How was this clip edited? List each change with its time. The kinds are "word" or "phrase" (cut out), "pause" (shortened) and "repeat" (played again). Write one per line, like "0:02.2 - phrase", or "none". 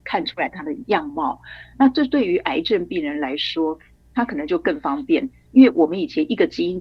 none

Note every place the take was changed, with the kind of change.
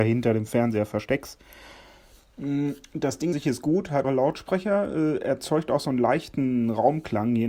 0:03.3 - word
0:04.0 - word

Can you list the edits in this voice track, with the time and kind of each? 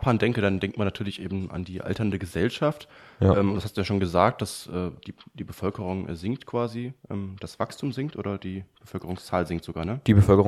none

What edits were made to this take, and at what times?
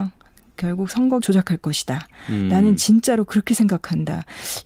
0:01.2 - word

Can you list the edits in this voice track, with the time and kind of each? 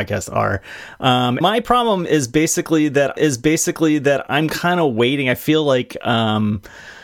0:01.4 - word
0:03.2 - repeat

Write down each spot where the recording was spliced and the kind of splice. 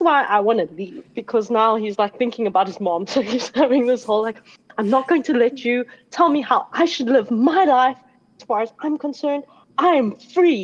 none

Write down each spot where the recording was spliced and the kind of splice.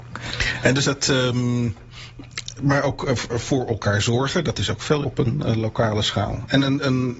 0:02.6 - word
0:03.3 - word
0:05.0 - word

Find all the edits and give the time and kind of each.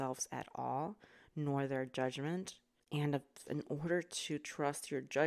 0:03.5 - word

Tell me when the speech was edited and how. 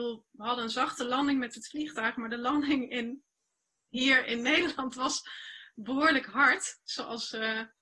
none

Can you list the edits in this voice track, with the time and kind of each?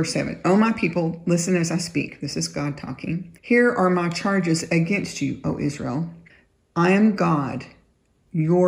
0:03.4 - pause
0:06.3 - pause

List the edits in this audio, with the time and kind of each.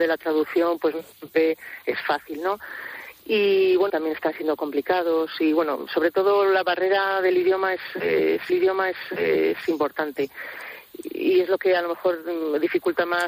0:03.9 - phrase
0:08.5 - repeat

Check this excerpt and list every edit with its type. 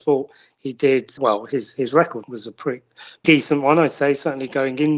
0:01.2 - word
0:02.2 - word
0:03.2 - word

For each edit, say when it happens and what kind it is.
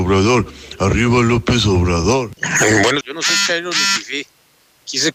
0:02.4 - pause
0:03.0 - word

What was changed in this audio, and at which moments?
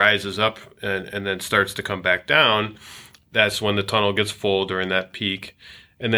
none

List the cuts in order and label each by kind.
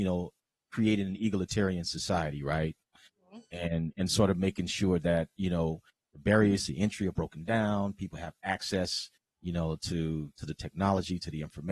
none

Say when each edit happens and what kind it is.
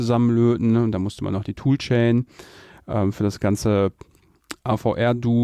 none

